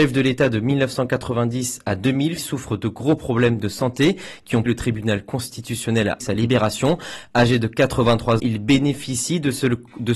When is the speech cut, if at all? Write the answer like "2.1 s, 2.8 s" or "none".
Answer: 2.4 s, 4.7 s, 6.2 s, 8.4 s